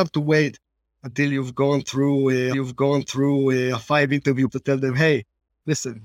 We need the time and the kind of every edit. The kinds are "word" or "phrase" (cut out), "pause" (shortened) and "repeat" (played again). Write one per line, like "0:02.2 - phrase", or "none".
0:02.5 - repeat
0:04.5 - word

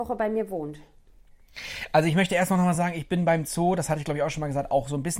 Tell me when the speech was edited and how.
none

